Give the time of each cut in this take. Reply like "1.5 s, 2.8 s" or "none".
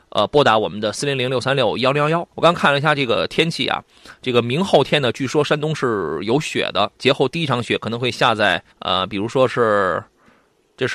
2.3 s, 8.7 s